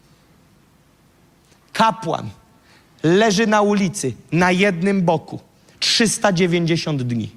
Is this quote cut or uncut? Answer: uncut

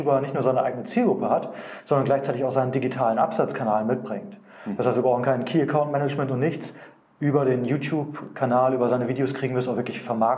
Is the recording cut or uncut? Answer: uncut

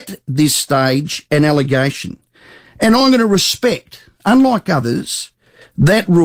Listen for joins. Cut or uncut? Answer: uncut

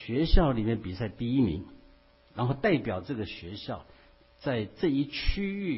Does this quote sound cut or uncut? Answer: uncut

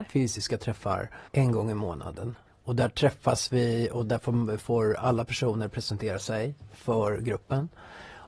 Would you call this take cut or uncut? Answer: cut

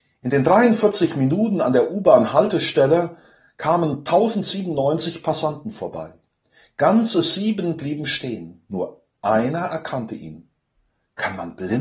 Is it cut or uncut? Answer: uncut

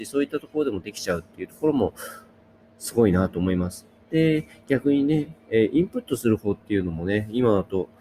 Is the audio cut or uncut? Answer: uncut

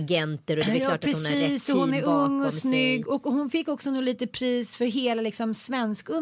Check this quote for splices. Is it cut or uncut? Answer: uncut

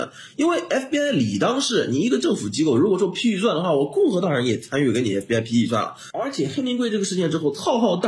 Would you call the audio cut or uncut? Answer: uncut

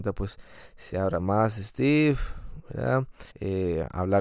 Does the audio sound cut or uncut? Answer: cut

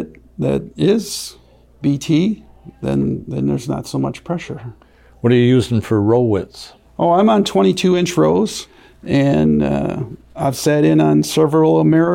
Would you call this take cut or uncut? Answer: cut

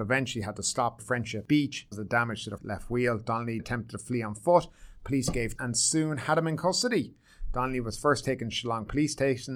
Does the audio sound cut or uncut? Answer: cut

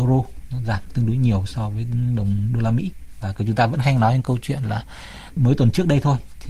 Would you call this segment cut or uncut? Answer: uncut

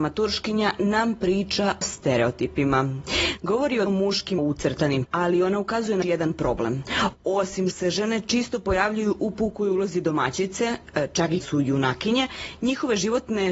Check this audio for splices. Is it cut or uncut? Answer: cut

